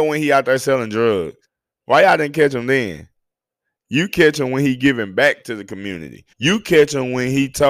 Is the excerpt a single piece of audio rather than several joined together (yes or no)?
no